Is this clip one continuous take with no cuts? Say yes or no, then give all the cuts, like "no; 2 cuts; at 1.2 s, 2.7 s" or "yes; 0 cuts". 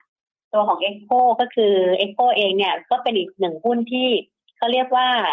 yes; 0 cuts